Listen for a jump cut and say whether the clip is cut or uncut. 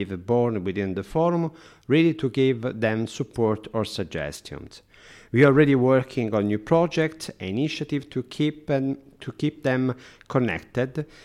uncut